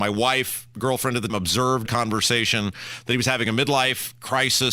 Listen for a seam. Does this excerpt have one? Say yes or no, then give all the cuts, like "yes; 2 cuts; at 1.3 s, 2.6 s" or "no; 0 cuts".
yes; 2 cuts; at 1.3 s, 1.9 s